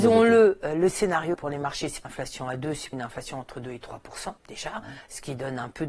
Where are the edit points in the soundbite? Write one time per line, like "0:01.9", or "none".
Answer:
0:01.3
0:02.0
0:02.9
0:04.4